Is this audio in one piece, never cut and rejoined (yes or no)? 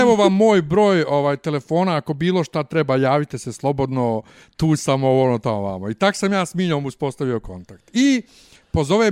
yes